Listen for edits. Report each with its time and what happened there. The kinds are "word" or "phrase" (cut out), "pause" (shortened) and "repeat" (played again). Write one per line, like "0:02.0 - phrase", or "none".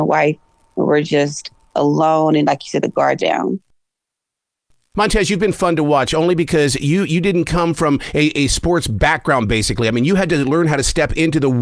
0:03.2 - word

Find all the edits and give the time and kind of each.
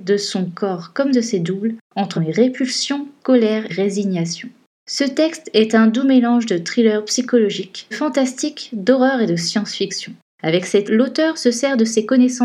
0:02.2 - word
0:03.7 - word
0:07.9 - word
0:10.8 - word

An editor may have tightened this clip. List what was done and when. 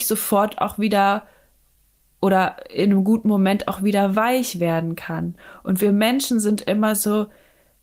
none

